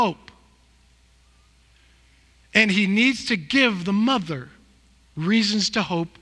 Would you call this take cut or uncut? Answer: uncut